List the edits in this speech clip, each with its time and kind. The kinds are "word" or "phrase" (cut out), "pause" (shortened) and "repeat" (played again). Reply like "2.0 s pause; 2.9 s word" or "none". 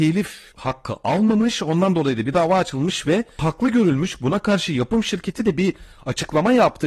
none